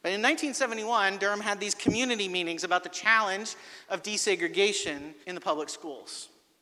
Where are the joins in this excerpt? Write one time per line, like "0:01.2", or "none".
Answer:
0:05.2